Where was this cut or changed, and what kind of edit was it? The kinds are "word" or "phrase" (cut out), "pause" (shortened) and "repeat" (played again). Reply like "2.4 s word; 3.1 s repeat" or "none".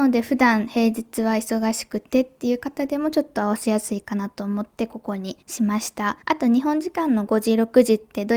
5.4 s pause; 6.2 s pause